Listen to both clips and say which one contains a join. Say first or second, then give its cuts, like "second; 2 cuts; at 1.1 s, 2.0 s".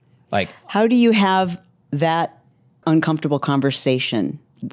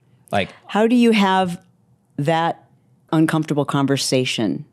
first; 1 cut; at 1.8 s